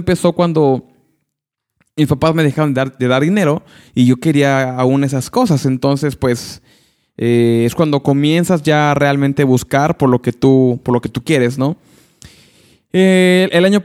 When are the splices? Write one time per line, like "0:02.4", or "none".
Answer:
none